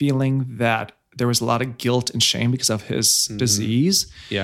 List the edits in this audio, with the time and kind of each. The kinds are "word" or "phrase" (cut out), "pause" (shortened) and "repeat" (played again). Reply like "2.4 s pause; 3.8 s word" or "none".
none